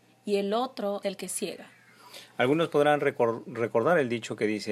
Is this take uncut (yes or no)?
no